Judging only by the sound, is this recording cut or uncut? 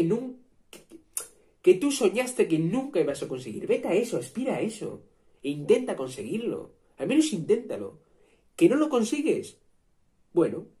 uncut